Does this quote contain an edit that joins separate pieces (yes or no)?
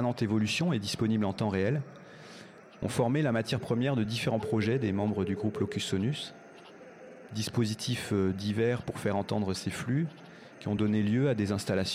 no